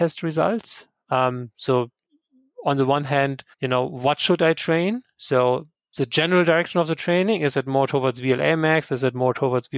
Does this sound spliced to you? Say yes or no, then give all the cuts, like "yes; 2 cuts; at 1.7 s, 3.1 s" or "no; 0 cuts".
yes; 2 cuts; at 2.1 s, 3.5 s